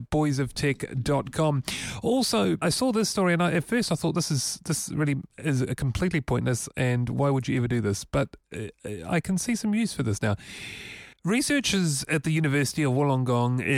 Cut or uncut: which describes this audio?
cut